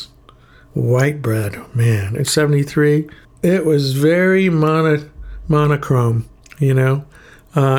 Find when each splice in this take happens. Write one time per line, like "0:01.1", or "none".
0:02.2
0:03.2
0:06.4